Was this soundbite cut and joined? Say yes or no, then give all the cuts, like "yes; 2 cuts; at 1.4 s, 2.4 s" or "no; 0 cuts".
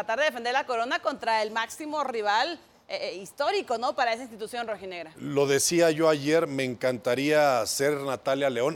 no; 0 cuts